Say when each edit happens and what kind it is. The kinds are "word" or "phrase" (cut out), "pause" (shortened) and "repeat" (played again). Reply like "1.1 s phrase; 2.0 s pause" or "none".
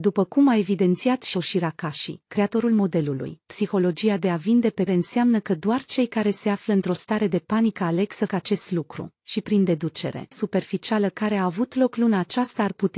1.3 s word; 4.9 s word; 8.3 s word; 10.3 s word

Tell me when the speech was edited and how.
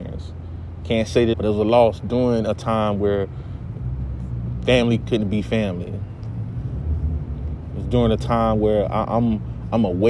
1.3 s phrase; 5.0 s word

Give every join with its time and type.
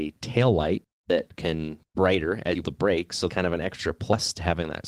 1.9 s word; 2.6 s word; 3.3 s word

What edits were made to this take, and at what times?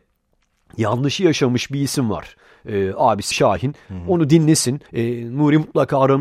3.3 s word; 4.9 s pause

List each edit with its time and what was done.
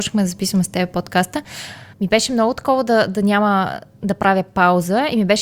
1.9 s pause

